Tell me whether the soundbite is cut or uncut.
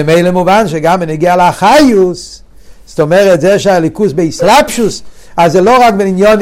uncut